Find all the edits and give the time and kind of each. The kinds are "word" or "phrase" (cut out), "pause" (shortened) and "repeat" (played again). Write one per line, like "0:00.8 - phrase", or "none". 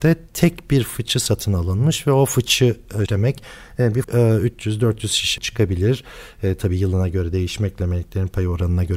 0:03.1 - word
0:04.0 - word
0:05.4 - word